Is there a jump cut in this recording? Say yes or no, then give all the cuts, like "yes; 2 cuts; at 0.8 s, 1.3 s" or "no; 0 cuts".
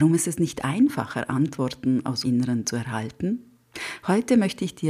yes; 1 cut; at 2.2 s